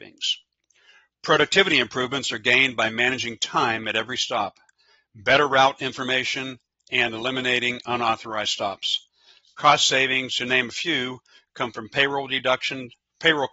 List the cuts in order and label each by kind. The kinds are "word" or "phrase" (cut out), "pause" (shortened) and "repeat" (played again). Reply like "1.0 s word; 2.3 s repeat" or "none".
none